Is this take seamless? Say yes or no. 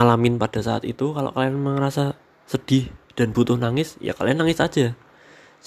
yes